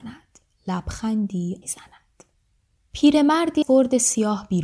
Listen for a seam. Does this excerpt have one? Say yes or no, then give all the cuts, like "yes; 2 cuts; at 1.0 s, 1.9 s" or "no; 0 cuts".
yes; 2 cuts; at 1.6 s, 3.6 s